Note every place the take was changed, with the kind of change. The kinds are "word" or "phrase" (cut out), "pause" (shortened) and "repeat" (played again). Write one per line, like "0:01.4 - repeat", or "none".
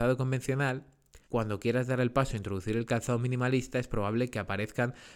0:01.2 - pause